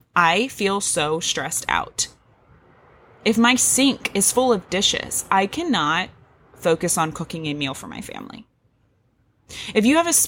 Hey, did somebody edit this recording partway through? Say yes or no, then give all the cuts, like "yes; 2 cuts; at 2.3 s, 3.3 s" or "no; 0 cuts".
no; 0 cuts